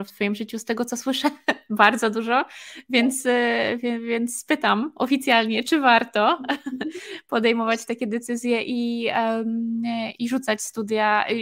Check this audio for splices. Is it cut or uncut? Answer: uncut